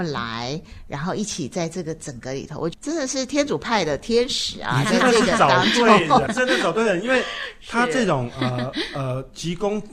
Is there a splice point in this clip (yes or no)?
yes